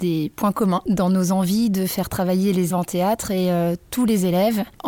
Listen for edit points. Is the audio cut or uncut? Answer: cut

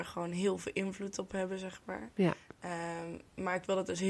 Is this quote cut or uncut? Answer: uncut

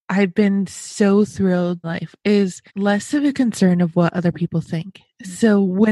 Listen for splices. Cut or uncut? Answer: cut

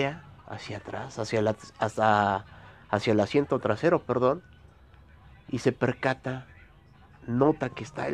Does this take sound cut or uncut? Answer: uncut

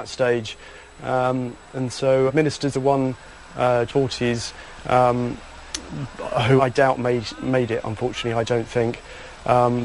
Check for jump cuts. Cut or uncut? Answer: cut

